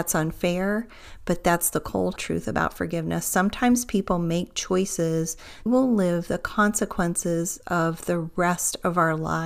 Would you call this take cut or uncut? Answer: cut